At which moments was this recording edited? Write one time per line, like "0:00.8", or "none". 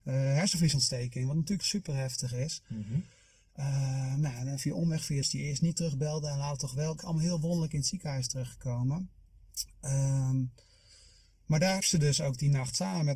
0:01.6
0:04.6
0:05.2
0:07.0
0:11.8